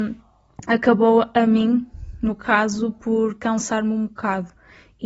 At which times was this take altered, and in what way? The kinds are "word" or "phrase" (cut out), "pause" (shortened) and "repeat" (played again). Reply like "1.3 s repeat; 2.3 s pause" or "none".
none